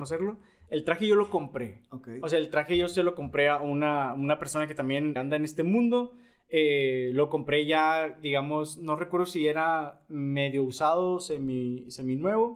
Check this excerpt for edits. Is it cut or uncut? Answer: cut